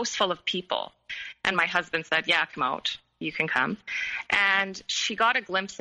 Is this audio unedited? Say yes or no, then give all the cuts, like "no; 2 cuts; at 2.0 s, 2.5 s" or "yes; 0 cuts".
yes; 0 cuts